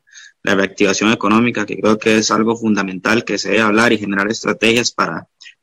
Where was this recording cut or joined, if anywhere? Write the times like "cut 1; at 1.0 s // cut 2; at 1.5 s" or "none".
none